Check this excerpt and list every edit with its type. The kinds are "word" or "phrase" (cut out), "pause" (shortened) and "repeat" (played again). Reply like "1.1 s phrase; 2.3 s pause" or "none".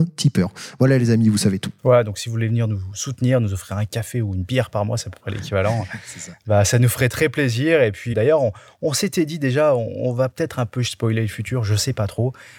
1.8 s pause; 8.1 s word